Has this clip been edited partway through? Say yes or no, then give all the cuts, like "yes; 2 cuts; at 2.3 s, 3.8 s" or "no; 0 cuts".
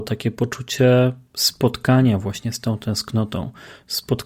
no; 0 cuts